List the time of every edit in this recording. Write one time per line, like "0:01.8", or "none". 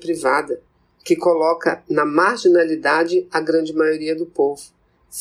none